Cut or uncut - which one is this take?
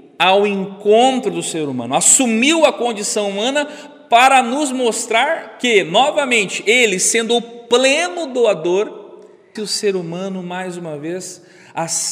cut